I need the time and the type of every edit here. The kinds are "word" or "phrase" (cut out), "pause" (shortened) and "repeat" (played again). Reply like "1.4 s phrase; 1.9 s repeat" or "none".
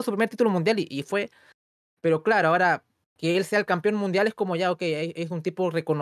none